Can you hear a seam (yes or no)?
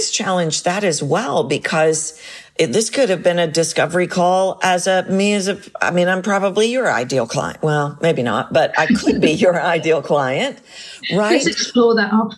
no